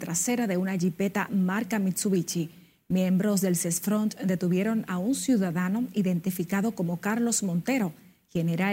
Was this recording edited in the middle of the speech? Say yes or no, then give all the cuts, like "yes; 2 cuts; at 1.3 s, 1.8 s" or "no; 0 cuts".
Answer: no; 0 cuts